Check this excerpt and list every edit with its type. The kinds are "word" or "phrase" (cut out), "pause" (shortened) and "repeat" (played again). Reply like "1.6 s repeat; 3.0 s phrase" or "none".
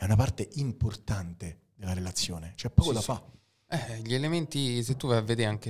none